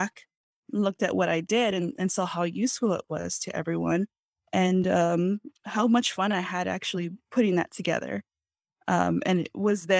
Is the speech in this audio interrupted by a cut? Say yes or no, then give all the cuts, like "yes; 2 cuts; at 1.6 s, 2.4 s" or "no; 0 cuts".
no; 0 cuts